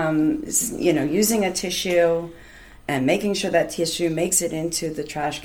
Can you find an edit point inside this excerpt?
no; 0 cuts

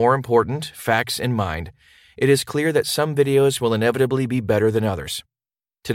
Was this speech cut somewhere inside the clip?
no; 0 cuts

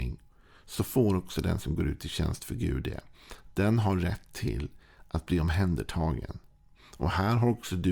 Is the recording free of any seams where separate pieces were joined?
yes; 0 cuts

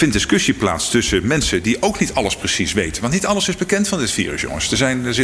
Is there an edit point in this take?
no; 0 cuts

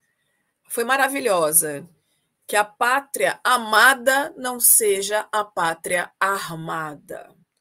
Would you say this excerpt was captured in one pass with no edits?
yes; 0 cuts

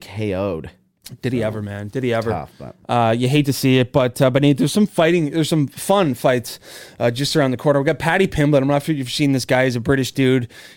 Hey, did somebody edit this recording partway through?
no; 0 cuts

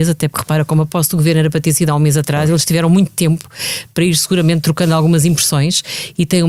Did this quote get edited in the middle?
no; 0 cuts

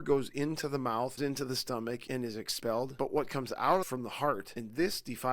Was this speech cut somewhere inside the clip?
yes; 2 cuts; at 1.2 s, 3.8 s

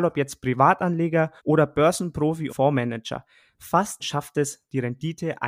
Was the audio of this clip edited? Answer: yes; 3 cuts; at 1.4 s, 2.5 s, 4.0 s

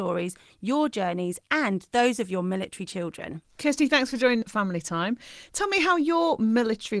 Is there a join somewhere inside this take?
yes; 1 cut; at 4.4 s

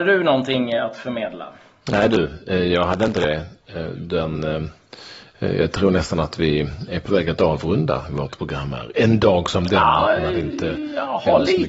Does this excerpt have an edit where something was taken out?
no; 0 cuts

